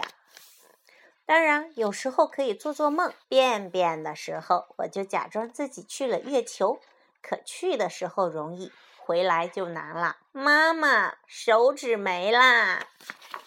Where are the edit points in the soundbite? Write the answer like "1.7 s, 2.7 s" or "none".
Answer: 3.2 s, 10.3 s